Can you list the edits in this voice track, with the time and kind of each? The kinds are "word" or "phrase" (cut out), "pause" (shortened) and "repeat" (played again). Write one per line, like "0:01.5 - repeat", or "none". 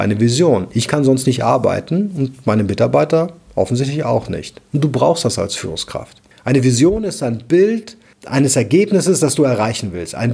none